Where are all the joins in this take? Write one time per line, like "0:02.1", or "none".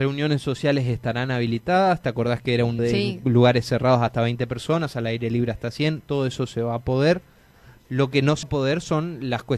0:02.8
0:08.4